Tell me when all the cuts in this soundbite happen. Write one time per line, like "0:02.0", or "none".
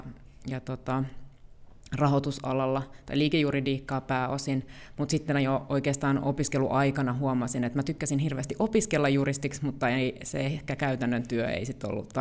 none

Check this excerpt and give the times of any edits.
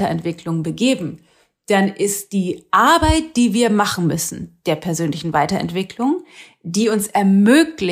none

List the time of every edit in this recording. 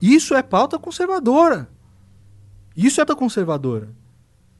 0:03.1

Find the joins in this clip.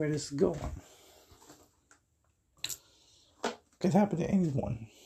0:03.8

